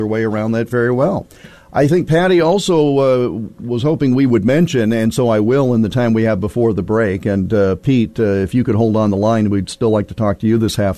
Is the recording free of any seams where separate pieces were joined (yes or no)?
yes